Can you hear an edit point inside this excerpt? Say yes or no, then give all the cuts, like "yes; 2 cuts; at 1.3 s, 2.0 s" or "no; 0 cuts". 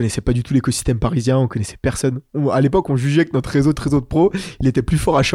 yes; 1 cut; at 3.7 s